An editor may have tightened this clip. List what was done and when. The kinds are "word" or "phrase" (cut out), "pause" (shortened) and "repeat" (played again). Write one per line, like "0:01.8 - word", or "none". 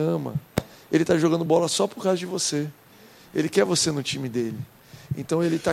none

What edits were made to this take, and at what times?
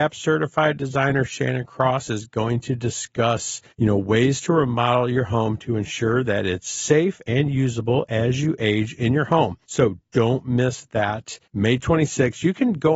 0:03.7 - pause
0:09.6 - pause
0:11.4 - pause

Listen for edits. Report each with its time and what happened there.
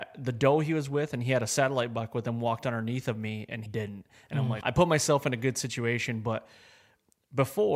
0:03.7 - word
0:04.6 - word

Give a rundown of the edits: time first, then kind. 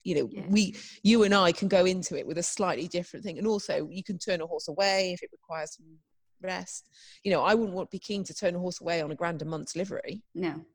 none

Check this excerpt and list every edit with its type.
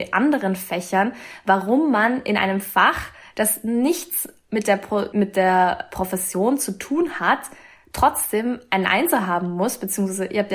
0:05.1 - word

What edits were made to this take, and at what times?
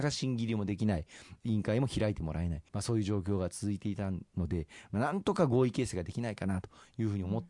0:02.7 - pause

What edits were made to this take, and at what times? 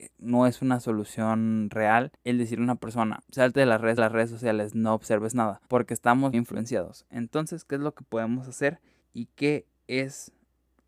0:02.1 - pause
0:03.2 - pause
0:04.0 - repeat
0:05.6 - pause
0:06.3 - word
0:09.0 - pause

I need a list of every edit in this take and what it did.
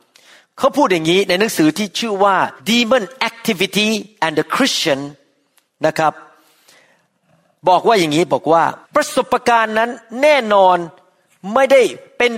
0:02.6 - pause
0:08.8 - pause

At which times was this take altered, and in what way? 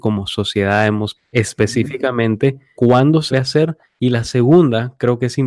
0:01.2 - word
0:02.8 - word
0:03.3 - word
0:03.8 - pause

